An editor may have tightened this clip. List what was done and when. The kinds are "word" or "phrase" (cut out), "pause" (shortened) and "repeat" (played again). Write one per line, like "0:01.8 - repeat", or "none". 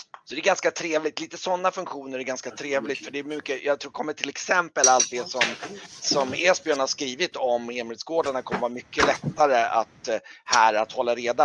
none

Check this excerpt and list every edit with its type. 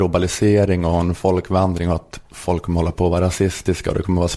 none

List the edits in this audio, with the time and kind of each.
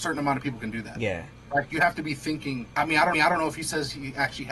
0:02.7 - pause
0:03.1 - repeat

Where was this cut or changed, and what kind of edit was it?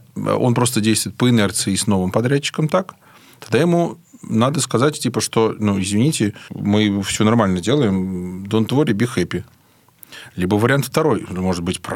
none

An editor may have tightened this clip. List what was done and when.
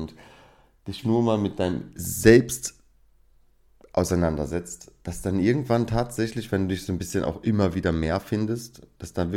0:01.0 - word

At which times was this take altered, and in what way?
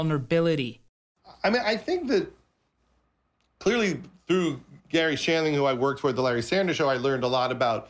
0:04.8 - pause

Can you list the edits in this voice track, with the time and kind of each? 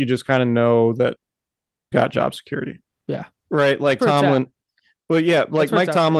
0:01.9 - word
0:02.9 - pause
0:04.0 - word

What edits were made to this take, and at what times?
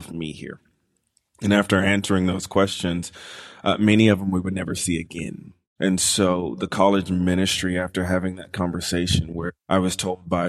0:09.6 - pause

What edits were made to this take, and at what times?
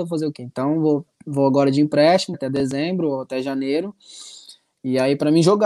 0:02.3 - word

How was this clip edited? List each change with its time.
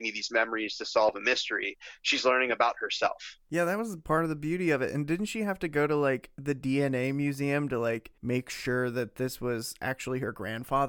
0:08.2 - pause

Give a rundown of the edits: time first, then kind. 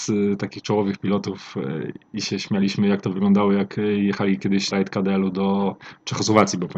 0:04.7 - word

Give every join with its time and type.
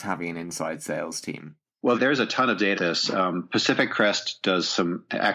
0:01.9 - word
0:02.7 - word

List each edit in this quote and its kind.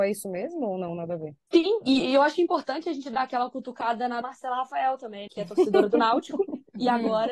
0:04.2 - word
0:05.3 - word

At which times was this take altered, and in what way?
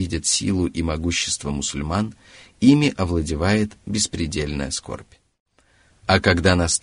none

